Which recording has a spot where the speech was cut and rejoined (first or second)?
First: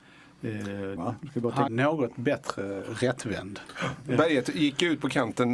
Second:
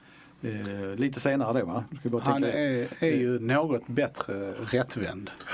first